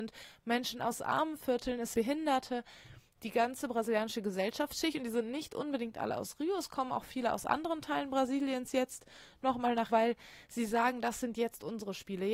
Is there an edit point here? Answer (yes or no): yes